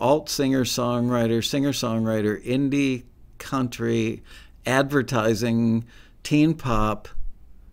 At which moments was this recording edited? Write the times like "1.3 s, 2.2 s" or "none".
none

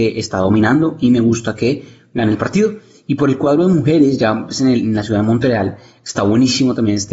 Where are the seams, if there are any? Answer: none

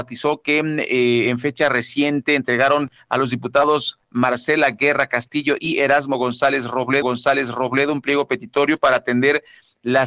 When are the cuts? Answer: 7.0 s

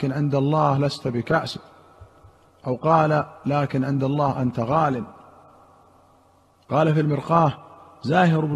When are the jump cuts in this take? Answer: none

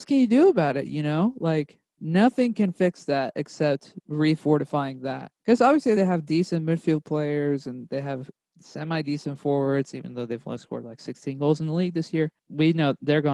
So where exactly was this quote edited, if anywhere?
none

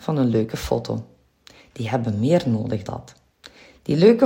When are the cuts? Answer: 2.9 s

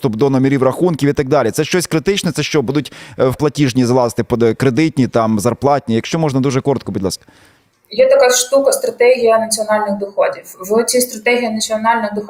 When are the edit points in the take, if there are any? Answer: 3.4 s

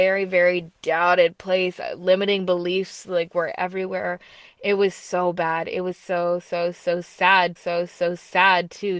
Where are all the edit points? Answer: 7.6 s

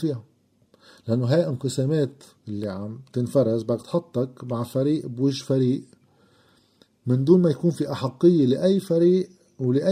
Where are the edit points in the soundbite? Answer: none

